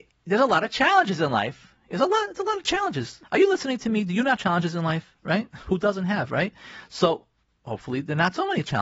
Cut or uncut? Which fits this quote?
cut